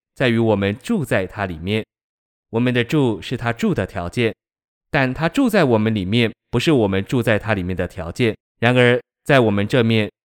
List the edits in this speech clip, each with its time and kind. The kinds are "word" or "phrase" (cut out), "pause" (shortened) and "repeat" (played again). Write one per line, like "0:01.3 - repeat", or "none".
0:08.4 - pause